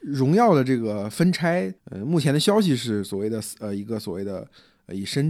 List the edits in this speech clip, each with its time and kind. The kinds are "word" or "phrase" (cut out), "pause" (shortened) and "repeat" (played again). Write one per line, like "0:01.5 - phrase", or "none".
0:01.8 - pause

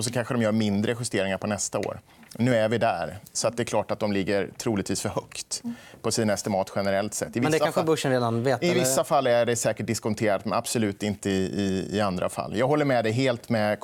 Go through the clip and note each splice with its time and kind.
none

